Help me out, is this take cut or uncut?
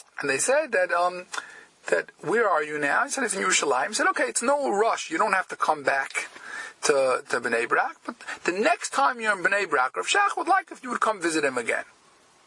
uncut